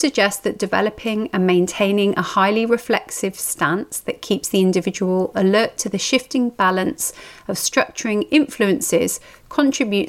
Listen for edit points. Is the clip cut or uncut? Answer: uncut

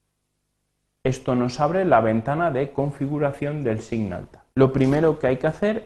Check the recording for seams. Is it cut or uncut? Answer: cut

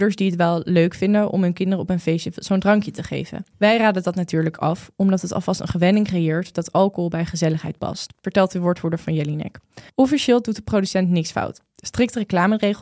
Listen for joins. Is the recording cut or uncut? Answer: cut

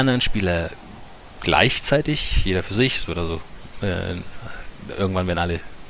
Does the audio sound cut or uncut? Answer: uncut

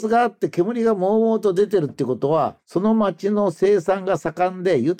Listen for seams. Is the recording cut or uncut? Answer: cut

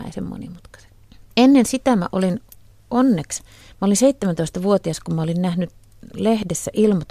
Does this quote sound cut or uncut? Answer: uncut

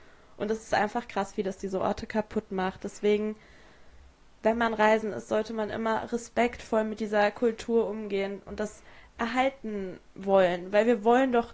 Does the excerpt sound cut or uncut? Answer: uncut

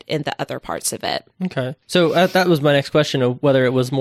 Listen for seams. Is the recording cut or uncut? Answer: cut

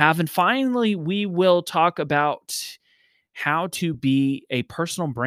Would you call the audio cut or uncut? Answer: uncut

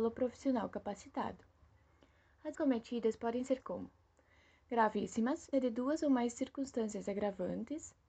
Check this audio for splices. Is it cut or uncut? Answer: cut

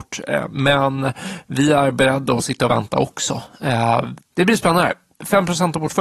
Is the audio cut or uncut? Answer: cut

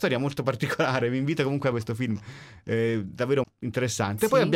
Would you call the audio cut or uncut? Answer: cut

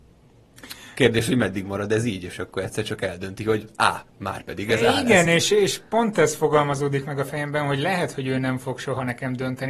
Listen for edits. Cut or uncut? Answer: uncut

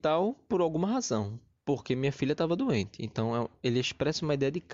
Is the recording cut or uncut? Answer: uncut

